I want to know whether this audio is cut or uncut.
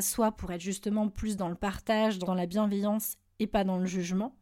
cut